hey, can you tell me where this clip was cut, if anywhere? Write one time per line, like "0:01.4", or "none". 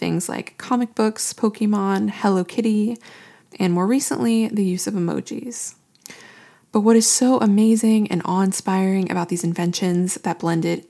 none